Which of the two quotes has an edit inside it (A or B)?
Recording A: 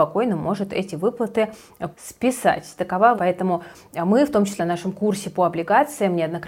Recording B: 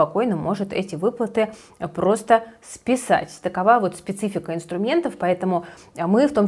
A